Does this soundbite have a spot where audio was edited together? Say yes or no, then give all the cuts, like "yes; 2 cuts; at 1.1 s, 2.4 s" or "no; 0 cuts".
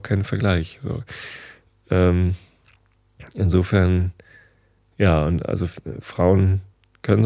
no; 0 cuts